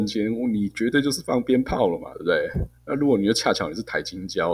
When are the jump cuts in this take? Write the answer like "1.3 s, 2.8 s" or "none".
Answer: 2.8 s